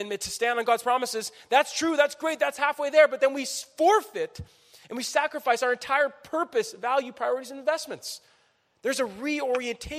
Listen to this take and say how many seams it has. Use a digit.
0